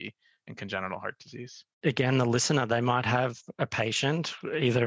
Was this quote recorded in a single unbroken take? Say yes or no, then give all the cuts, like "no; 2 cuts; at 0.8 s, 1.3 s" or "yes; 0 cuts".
no; 1 cut; at 1.7 s